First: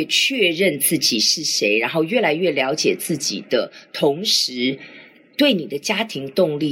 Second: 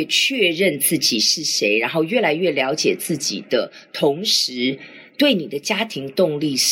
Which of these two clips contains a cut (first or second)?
second